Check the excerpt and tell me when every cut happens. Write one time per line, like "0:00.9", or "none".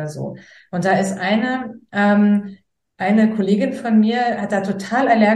none